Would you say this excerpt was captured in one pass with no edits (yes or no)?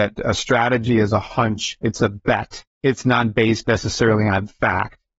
no